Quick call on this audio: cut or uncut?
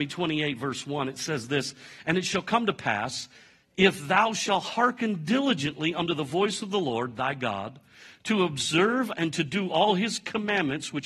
uncut